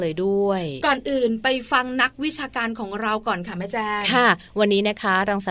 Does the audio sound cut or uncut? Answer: uncut